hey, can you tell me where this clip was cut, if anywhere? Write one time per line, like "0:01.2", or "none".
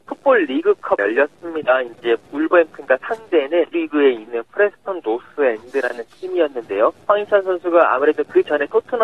0:01.0
0:03.7
0:07.0